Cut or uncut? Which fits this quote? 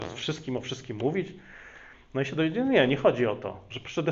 uncut